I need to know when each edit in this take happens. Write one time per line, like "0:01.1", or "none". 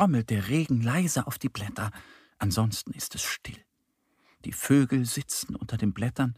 none